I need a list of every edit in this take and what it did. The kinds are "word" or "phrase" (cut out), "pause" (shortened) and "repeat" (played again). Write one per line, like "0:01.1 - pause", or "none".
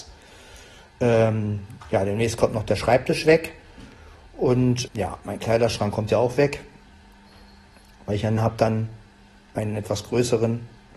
0:04.9 - word
0:08.4 - word